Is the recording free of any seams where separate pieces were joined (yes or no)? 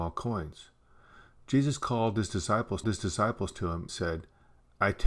no